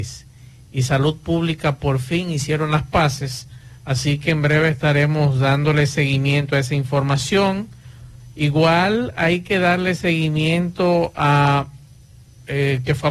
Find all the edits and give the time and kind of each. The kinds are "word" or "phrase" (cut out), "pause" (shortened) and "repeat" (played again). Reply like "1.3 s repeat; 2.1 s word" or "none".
none

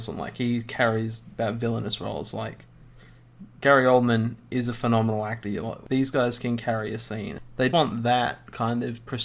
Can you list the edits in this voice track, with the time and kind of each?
1.4 s word; 7.7 s word

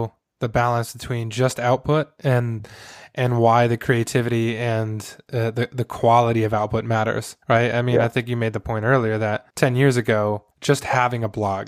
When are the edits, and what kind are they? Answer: 7.4 s pause; 9.5 s pause; 10.5 s pause

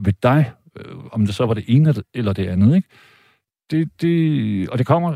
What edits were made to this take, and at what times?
none

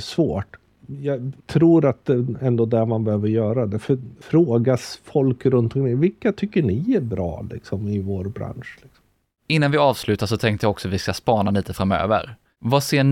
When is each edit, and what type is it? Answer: none

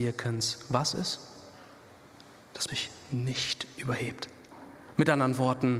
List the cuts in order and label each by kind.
2.7 s word

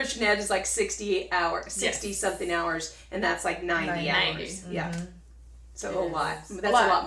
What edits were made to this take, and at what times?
none

